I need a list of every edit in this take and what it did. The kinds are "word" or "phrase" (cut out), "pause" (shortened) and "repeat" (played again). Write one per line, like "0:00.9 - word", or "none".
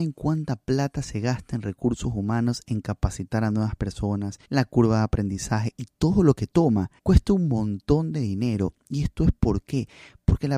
0:04.4 - pause
0:07.0 - pause